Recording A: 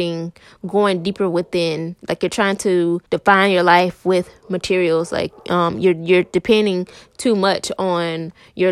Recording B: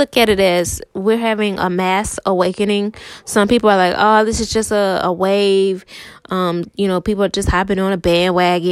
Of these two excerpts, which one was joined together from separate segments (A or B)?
A